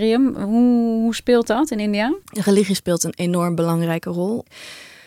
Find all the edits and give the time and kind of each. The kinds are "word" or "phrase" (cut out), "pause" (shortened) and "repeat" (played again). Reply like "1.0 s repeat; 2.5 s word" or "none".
2.2 s pause